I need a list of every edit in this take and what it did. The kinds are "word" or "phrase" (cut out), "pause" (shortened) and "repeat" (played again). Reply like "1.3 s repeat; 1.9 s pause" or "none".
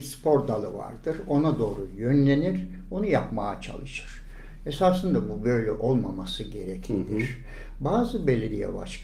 none